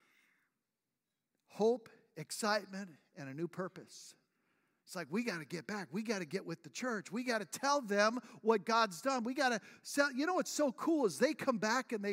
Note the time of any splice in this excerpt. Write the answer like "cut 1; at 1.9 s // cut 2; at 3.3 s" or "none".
none